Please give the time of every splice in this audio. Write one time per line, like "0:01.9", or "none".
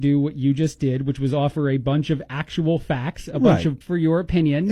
0:03.8